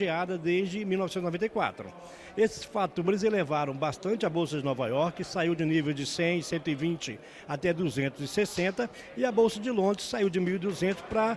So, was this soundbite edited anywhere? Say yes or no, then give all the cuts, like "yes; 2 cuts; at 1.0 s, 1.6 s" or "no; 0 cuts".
no; 0 cuts